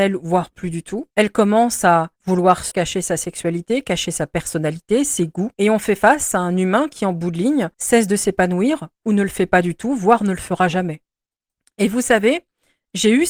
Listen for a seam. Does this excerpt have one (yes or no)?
yes